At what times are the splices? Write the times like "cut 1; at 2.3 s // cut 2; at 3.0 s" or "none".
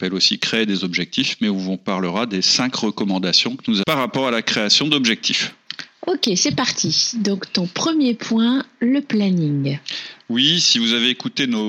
cut 1; at 3.8 s